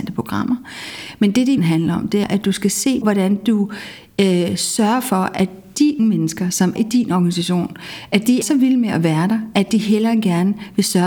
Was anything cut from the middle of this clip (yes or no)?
yes